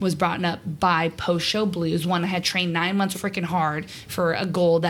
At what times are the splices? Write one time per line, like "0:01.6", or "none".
0:03.1